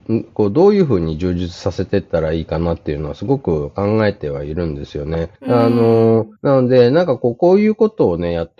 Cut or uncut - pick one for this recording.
cut